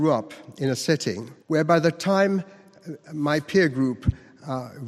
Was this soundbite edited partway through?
yes; 1 cut; at 1.4 s

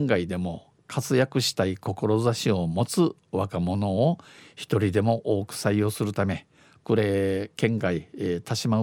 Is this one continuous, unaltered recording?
yes; 0 cuts

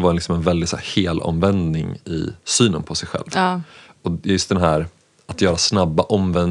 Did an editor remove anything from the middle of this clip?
no; 0 cuts

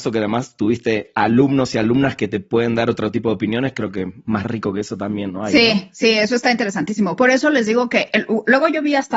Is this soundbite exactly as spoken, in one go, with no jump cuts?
no; 1 cut; at 5.3 s

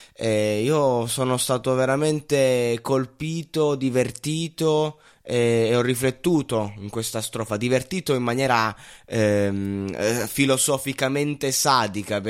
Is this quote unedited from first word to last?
yes; 0 cuts

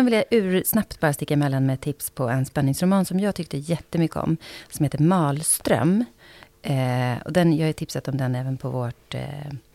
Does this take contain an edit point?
no; 0 cuts

